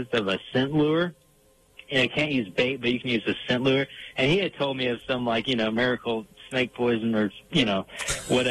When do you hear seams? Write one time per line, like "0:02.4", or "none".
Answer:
none